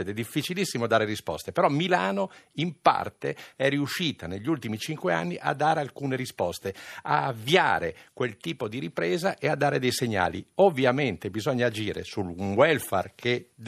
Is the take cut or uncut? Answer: uncut